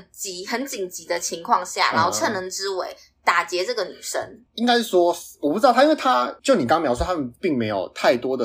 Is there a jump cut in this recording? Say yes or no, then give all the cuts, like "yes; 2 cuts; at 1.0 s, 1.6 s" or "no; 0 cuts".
yes; 2 cuts; at 4.5 s, 6.4 s